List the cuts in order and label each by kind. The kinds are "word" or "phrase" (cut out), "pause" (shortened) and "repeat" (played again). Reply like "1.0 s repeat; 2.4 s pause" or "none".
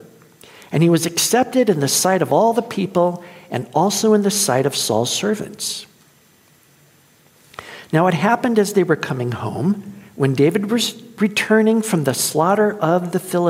10.1 s pause

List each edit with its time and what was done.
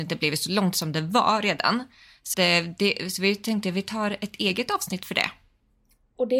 2.3 s word

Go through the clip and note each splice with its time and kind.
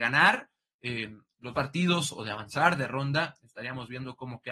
1.5 s word

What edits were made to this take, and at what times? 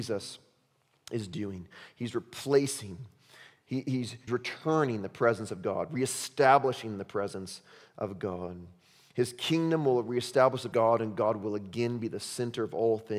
4.3 s word; 10.7 s phrase

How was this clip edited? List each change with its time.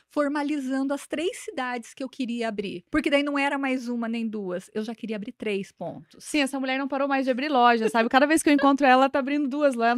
2.9 s pause

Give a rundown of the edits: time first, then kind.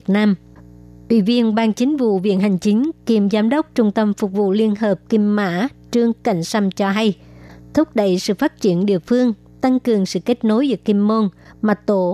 none

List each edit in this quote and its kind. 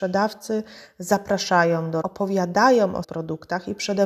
2.0 s word; 3.0 s word

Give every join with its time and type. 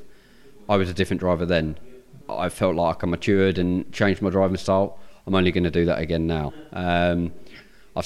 2.2 s pause

